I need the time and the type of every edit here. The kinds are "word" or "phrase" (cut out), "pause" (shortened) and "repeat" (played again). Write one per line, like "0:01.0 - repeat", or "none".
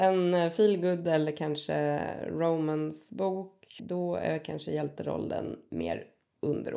0:03.8 - word